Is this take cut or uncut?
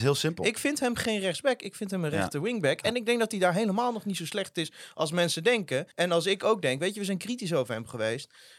cut